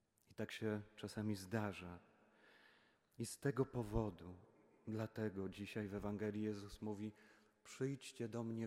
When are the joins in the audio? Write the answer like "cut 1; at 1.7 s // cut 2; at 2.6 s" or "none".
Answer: none